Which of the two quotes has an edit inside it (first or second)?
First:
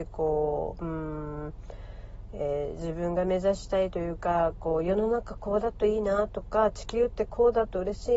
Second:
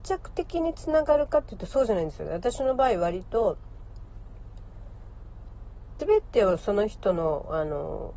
second